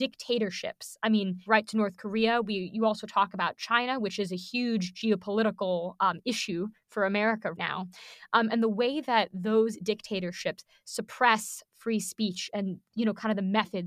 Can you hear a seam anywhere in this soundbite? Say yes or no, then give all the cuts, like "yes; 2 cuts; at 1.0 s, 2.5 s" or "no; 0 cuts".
yes; 2 cuts; at 1.5 s, 7.5 s